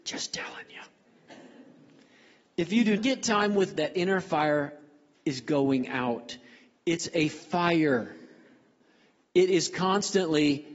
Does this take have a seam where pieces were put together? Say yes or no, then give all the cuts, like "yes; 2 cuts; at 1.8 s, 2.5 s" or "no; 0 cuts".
yes; 2 cuts; at 3.0 s, 3.8 s